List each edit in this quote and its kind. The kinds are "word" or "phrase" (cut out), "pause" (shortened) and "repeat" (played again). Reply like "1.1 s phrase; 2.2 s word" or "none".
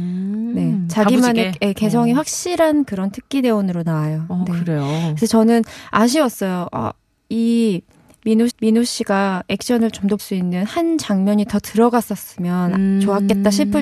8.5 s repeat; 10.2 s word